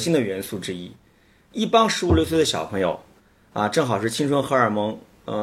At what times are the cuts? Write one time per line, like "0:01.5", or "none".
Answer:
none